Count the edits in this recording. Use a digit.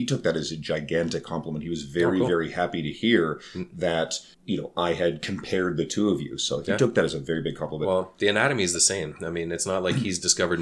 1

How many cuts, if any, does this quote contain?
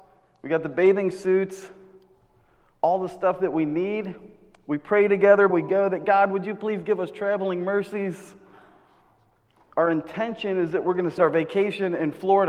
2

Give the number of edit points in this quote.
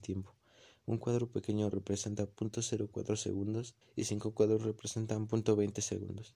1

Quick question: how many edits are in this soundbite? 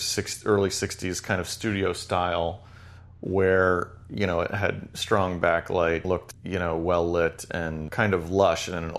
1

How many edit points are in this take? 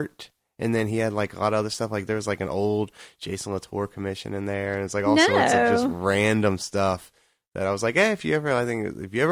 0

